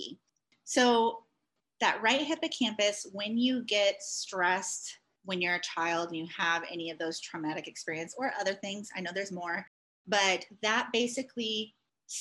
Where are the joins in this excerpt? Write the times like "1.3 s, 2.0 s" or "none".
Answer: none